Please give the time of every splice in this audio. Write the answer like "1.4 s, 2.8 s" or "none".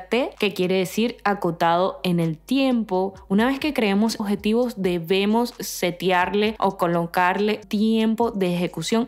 4.2 s, 7.6 s

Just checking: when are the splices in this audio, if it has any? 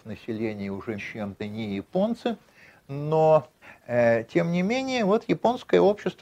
1.0 s, 1.4 s, 3.6 s

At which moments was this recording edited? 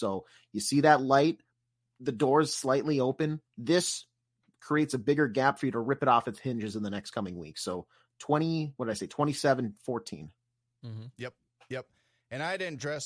3.5 s

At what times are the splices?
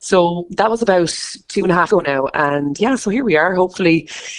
1.9 s, 2.8 s

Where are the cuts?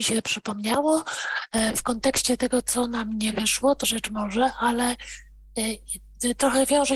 3.8 s

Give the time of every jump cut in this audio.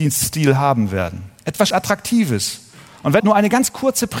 1.7 s, 3.2 s

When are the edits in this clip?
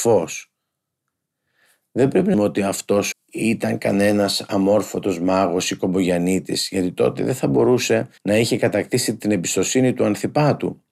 2.3 s, 3.1 s, 8.2 s

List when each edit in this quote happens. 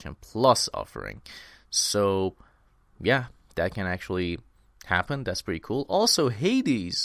none

